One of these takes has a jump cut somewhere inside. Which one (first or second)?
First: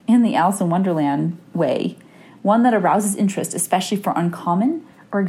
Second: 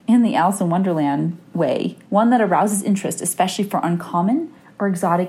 second